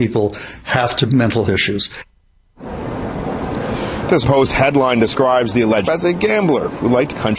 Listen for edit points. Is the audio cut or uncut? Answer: cut